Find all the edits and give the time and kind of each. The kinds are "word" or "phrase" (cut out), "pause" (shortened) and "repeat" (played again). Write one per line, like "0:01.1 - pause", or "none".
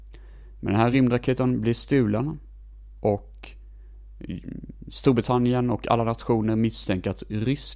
none